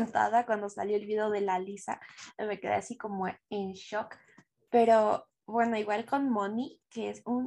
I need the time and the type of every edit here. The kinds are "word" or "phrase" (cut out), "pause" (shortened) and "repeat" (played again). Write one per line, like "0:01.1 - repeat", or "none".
none